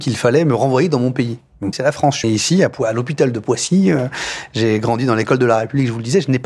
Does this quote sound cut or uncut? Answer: cut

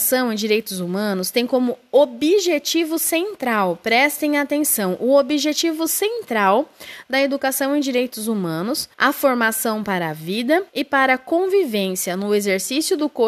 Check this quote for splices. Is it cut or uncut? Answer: cut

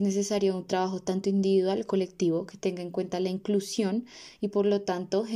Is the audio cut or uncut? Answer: cut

